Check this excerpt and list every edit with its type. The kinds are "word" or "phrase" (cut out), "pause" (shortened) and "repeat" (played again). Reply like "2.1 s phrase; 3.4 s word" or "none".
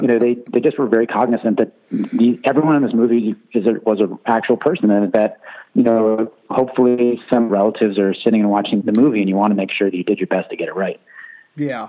7.5 s phrase; 8.8 s word